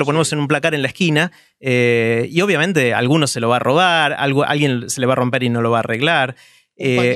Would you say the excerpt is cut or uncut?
uncut